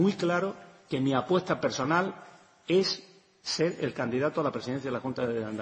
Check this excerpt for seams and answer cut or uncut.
uncut